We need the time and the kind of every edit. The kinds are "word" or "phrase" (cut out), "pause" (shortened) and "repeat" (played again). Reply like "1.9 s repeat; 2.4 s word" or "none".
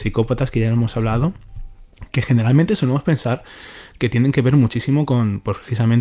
none